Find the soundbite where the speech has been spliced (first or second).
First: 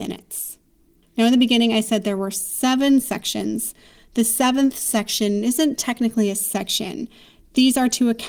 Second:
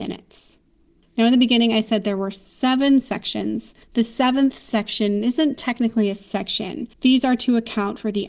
second